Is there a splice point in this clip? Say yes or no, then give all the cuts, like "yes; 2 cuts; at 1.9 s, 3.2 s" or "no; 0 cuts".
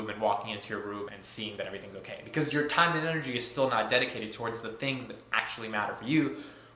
yes; 1 cut; at 1.1 s